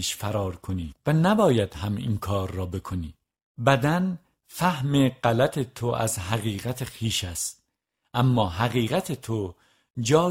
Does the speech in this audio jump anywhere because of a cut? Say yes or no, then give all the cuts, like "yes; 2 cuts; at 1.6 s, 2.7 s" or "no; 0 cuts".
no; 0 cuts